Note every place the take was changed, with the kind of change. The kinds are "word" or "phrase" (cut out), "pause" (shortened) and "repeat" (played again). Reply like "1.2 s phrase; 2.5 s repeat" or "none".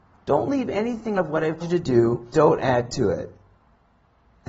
1.1 s word; 1.6 s word; 2.3 s word